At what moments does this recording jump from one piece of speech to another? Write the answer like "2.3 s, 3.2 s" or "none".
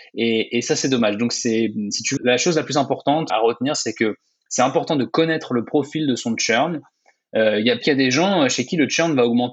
2.2 s, 3.3 s, 7.8 s